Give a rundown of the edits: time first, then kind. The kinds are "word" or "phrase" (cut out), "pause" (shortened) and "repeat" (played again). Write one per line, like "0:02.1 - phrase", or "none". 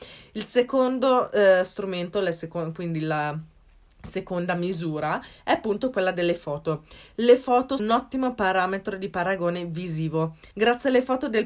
0:07.8 - word
0:10.5 - pause